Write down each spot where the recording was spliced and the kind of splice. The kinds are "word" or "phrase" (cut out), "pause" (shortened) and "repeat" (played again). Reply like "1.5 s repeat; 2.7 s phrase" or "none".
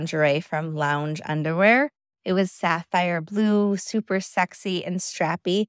none